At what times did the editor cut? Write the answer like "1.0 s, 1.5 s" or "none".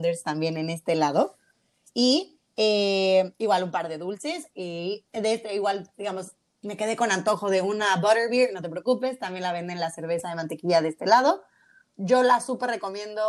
none